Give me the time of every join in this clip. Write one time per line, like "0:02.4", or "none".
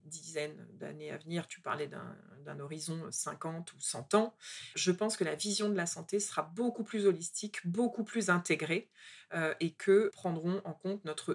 0:04.7
0:10.1